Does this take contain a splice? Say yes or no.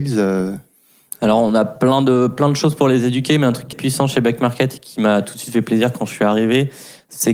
yes